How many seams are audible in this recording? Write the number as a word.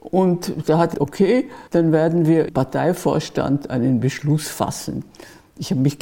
three